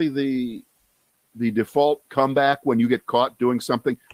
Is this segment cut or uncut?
uncut